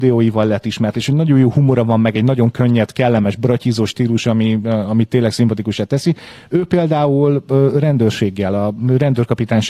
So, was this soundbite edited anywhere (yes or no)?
no